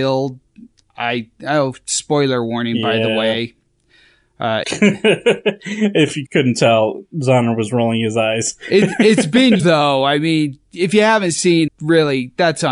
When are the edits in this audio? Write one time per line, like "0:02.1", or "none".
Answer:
0:04.6
0:06.3
0:09.6
0:11.7